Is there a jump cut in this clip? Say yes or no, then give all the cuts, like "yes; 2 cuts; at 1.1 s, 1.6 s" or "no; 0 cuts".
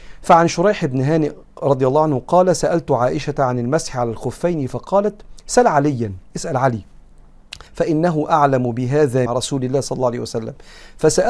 yes; 2 cuts; at 7.7 s, 9.3 s